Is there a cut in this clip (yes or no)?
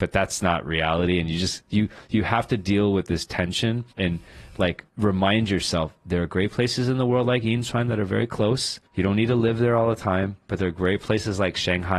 yes